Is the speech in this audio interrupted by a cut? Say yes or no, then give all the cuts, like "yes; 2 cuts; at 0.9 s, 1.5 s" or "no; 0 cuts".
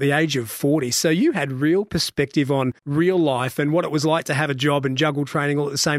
yes; 1 cut; at 2.8 s